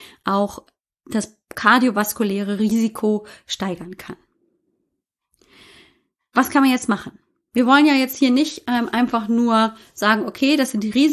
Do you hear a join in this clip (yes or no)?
no